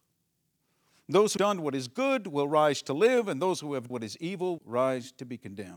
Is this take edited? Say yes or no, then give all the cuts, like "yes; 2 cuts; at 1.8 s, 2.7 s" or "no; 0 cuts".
yes; 3 cuts; at 1.4 s, 3.9 s, 4.6 s